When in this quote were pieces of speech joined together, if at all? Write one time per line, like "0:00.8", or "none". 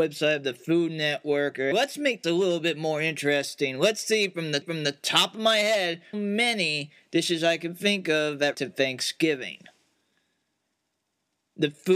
0:01.7
0:02.2
0:04.6
0:06.1
0:08.5

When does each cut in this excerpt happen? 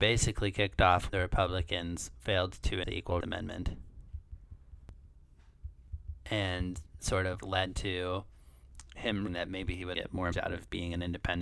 0:01.1
0:02.8
0:03.2
0:07.0
0:07.4
0:09.3
0:09.9
0:10.3

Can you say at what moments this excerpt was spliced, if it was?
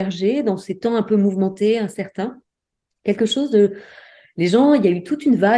none

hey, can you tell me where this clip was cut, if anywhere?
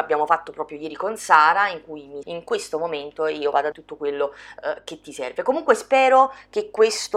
0:02.2
0:03.7

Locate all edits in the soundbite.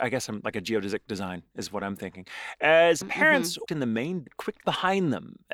0:03.0
0:03.7
0:04.3
0:04.6

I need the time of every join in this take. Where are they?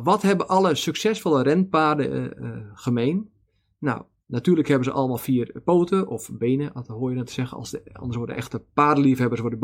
none

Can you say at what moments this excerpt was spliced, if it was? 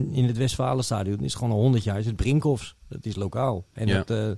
none

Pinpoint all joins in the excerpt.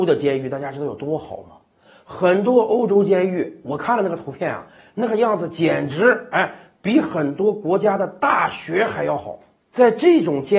none

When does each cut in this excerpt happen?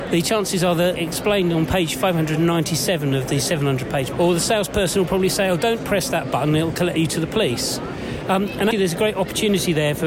0:01.0
0:04.1
0:08.7

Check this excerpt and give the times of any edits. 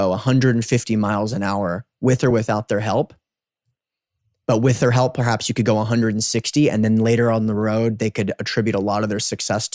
none

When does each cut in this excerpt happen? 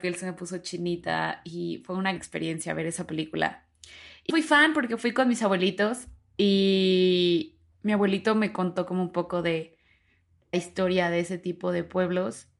0:02.2
0:04.3
0:07.7
0:10.5

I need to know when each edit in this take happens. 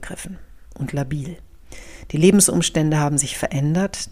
none

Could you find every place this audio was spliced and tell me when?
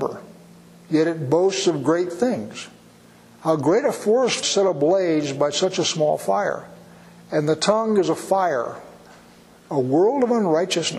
none

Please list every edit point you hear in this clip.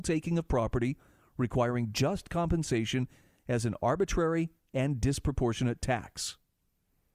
none

